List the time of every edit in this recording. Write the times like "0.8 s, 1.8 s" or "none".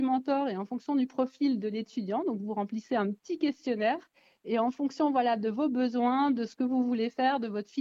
none